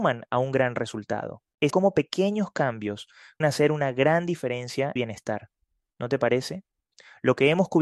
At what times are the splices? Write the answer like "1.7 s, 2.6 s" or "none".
1.7 s, 3.4 s, 5.0 s